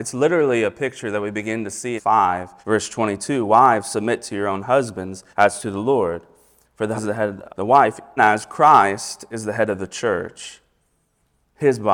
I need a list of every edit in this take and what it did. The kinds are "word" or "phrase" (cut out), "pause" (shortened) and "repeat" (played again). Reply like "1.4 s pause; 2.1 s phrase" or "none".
2.0 s phrase; 2.6 s pause; 5.3 s pause; 7.0 s word; 7.5 s word; 8.2 s word